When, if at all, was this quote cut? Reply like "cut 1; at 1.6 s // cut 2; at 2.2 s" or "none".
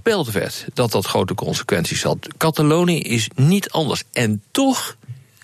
none

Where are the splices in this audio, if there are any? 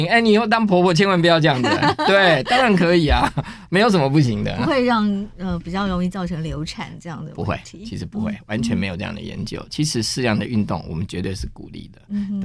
none

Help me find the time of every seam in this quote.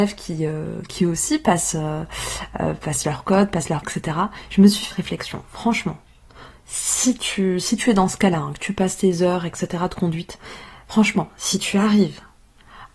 cut 1; at 3.8 s // cut 2; at 4.9 s

